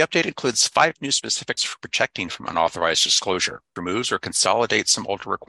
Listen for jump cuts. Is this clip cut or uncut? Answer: cut